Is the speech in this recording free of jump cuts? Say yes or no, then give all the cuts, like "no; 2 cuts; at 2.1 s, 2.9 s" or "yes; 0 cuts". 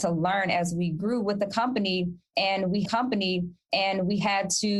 no; 1 cut; at 2.9 s